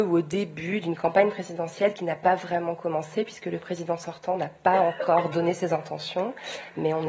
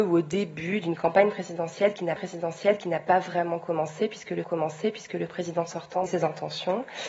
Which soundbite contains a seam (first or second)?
second